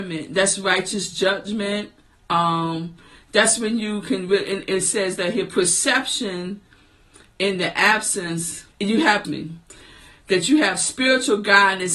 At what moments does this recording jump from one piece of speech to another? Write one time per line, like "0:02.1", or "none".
0:08.7
0:09.2